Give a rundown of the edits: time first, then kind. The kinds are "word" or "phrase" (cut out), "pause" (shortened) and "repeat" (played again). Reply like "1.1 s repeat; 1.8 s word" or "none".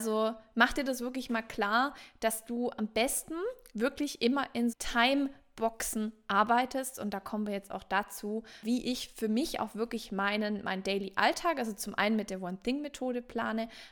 4.7 s word; 8.6 s word